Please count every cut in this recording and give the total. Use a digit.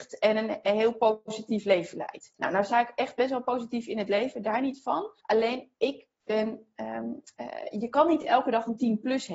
3